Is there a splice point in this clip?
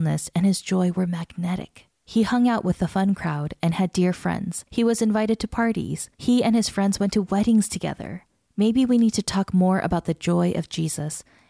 yes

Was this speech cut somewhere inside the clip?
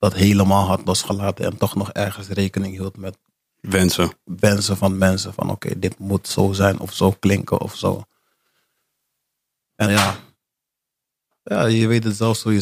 yes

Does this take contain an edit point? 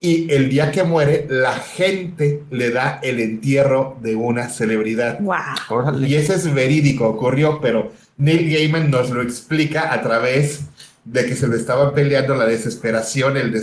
no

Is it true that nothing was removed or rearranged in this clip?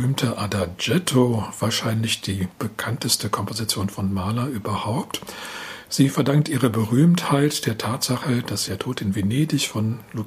no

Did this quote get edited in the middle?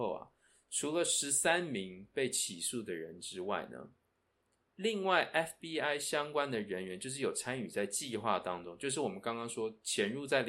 no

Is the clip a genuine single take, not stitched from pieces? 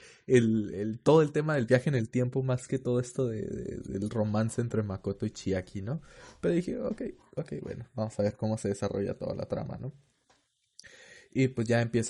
yes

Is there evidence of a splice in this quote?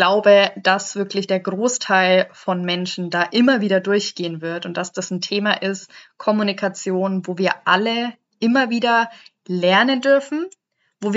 no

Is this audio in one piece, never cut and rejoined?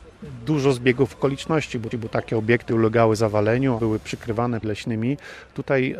no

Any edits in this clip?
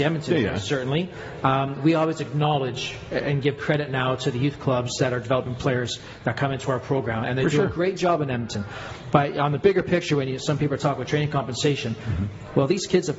no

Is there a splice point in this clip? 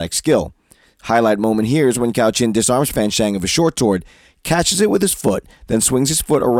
no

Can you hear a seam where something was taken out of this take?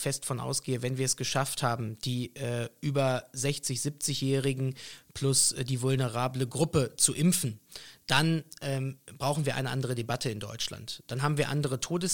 no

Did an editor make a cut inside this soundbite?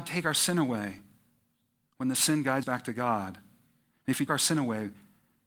yes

